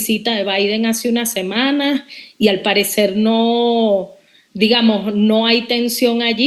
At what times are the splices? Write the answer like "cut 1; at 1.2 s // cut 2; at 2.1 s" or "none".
none